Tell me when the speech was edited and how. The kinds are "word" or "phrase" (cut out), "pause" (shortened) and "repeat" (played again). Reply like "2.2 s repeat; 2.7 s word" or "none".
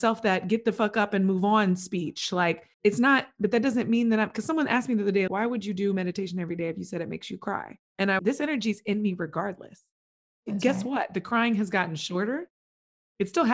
2.7 s pause; 5.3 s word; 7.9 s pause; 8.2 s phrase